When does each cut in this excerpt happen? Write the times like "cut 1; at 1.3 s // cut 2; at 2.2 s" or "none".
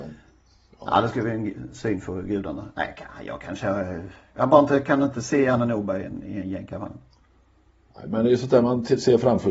none